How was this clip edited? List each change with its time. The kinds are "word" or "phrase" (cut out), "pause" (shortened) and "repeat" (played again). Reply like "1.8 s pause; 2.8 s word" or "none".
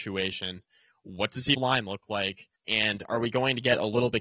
1.5 s word; 2.5 s pause